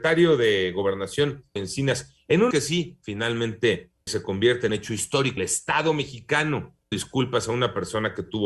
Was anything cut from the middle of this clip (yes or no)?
yes